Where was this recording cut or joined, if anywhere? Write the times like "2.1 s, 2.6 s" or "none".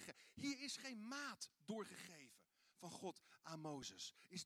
none

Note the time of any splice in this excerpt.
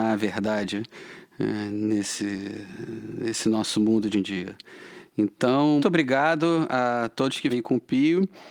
4.1 s, 5.8 s, 7.5 s

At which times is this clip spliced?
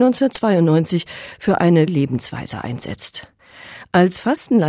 1.9 s

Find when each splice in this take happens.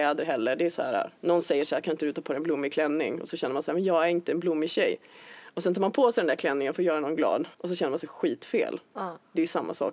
1.2 s, 7.5 s

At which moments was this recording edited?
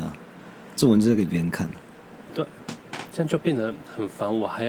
2.3 s

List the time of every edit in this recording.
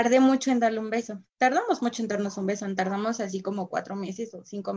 1.3 s

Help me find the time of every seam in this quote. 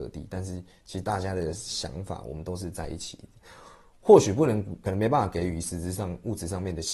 4.8 s

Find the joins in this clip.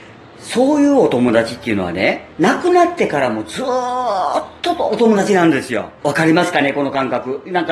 2.3 s, 6.0 s

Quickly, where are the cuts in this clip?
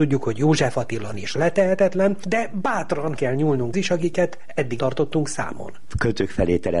1.1 s, 3.2 s, 3.7 s, 4.8 s

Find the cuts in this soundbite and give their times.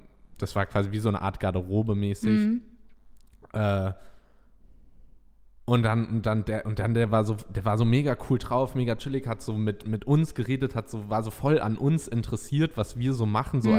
none

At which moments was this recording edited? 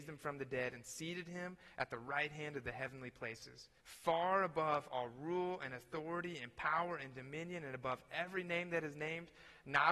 3.8 s

